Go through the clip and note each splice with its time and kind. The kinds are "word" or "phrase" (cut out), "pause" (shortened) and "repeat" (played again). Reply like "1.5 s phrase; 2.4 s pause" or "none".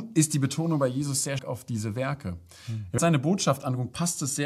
1.4 s word; 3.0 s word